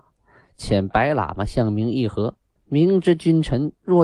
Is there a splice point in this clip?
yes; 1 cut; at 2.6 s

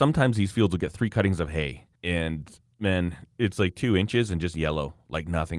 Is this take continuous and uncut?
no; 1 cut; at 2.0 s

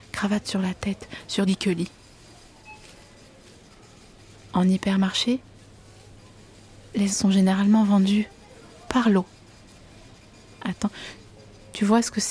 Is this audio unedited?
no; 3 cuts; at 1.5 s, 7.1 s, 10.6 s

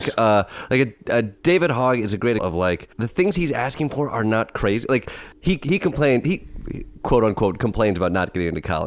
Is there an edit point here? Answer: yes; 3 cuts; at 2.4 s, 2.9 s, 5.3 s

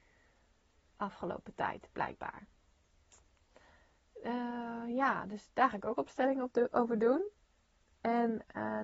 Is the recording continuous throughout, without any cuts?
yes; 0 cuts

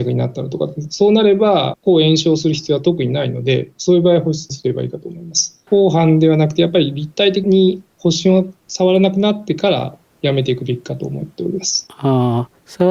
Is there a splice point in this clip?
yes; 1 cut; at 5.7 s

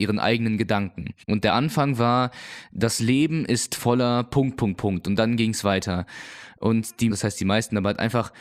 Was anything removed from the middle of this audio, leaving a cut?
yes; 2 cuts; at 1.2 s, 7.1 s

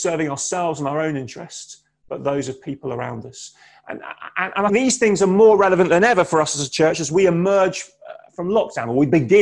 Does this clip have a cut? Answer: yes; 1 cut; at 4.7 s

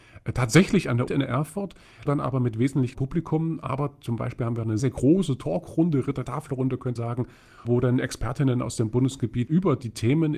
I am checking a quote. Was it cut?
yes; 8 cuts; at 1.1 s, 2.1 s, 2.9 s, 4.8 s, 6.2 s, 7.0 s, 7.6 s, 9.5 s

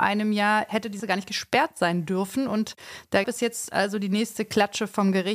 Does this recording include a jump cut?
yes; 2 cuts; at 1.0 s, 3.2 s

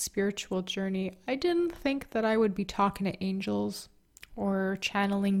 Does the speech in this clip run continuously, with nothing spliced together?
yes; 0 cuts

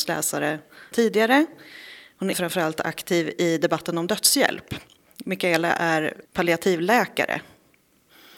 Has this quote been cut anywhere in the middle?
yes; 3 cuts; at 0.9 s, 2.3 s, 6.3 s

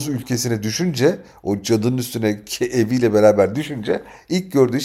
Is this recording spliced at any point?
no; 0 cuts

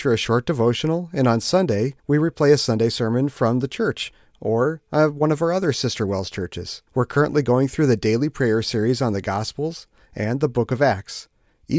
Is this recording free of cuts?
no; 2 cuts; at 2.0 s, 6.9 s

